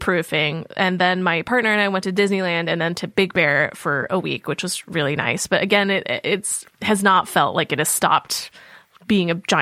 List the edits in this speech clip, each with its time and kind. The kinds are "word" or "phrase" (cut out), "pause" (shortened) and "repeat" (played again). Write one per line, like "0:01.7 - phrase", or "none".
none

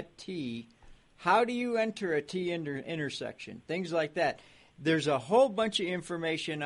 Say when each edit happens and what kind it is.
none

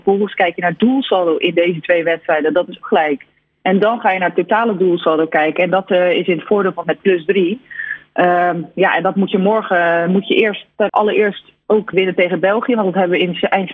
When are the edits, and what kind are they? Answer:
0:02.8 - word
0:06.8 - word
0:10.9 - word
0:11.9 - word

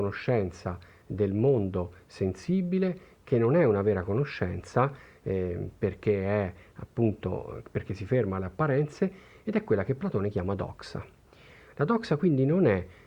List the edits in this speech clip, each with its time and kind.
none

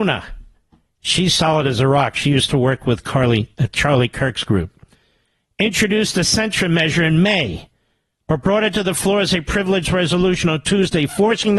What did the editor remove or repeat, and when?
none

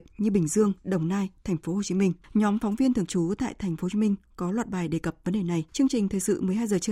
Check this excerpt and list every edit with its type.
0:02.2 - pause
0:05.7 - pause

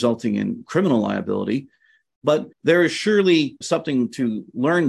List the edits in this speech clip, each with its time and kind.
0:02.5 - pause
0:03.6 - word

